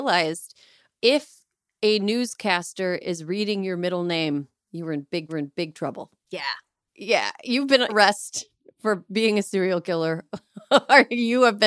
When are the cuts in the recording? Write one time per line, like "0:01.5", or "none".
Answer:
0:05.3
0:07.9